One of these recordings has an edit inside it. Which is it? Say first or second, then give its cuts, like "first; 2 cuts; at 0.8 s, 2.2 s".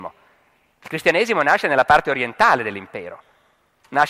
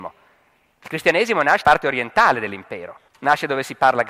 second; 2 cuts; at 1.6 s, 3.1 s